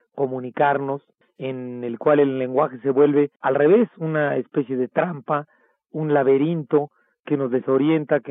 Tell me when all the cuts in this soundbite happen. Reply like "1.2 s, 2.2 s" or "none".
3.4 s

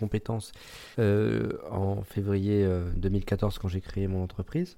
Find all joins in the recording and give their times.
0.9 s

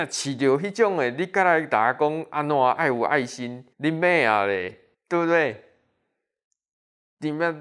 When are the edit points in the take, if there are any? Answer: 3.7 s, 4.9 s

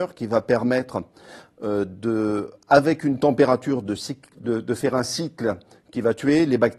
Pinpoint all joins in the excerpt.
none

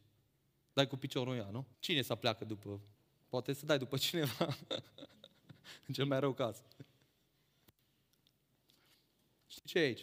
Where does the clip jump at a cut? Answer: 1.7 s, 2.9 s

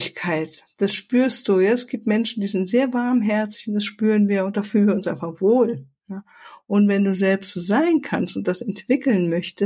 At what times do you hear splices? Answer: none

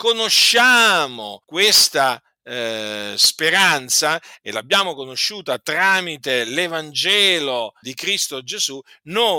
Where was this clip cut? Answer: 1.4 s, 7.8 s

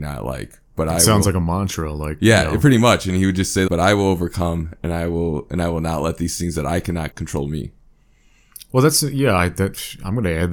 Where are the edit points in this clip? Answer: 3.7 s, 7.1 s

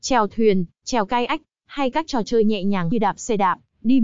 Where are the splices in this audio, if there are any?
2.9 s

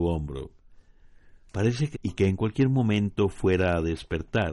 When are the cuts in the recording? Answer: 1.9 s

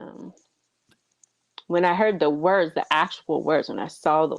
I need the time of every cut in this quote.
none

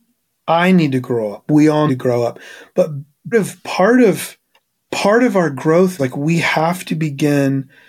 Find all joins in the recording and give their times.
1.9 s, 3.3 s, 4.6 s, 6.0 s

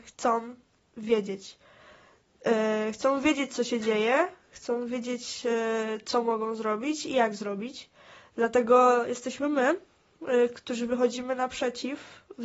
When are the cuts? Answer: 10.5 s

